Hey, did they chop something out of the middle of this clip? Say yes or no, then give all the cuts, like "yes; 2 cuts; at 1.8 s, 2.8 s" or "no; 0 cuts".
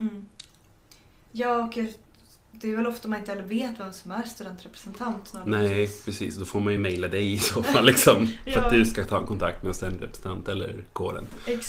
no; 0 cuts